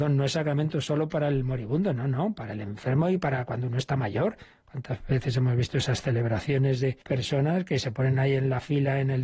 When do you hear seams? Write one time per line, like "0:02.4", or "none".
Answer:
0:07.0